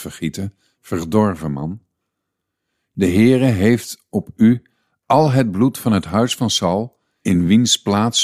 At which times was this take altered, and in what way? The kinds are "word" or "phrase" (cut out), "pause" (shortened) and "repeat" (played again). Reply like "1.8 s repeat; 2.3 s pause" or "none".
none